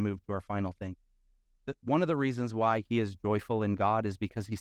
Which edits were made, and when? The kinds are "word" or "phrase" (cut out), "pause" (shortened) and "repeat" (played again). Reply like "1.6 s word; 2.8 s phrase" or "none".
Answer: none